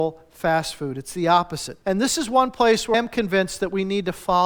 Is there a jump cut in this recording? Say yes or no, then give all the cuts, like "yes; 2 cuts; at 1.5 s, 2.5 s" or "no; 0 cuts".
yes; 2 cuts; at 1.8 s, 2.9 s